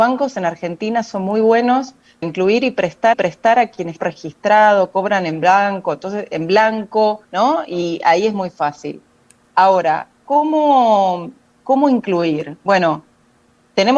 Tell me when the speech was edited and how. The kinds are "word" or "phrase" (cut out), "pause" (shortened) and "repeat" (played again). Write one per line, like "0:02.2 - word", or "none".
0:02.2 - word
0:03.1 - repeat
0:04.0 - phrase
0:07.2 - pause